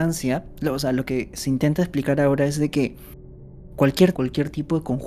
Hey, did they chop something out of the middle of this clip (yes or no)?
yes